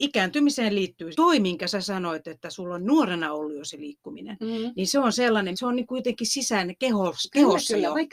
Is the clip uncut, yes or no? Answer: no